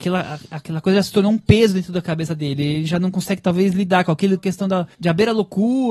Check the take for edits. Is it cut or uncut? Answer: cut